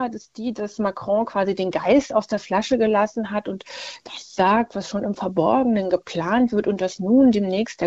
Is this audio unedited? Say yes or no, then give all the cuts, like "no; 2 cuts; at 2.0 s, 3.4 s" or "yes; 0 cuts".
yes; 0 cuts